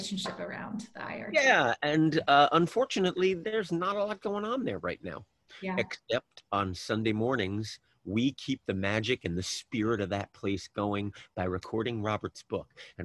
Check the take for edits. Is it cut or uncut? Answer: uncut